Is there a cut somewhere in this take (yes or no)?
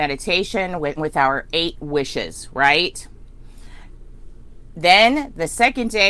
yes